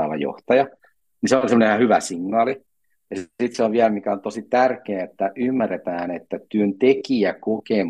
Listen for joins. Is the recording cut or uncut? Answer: uncut